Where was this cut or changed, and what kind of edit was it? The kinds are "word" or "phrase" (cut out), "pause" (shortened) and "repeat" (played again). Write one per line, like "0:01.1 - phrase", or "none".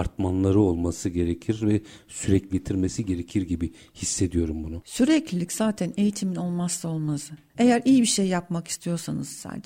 0:02.5 - word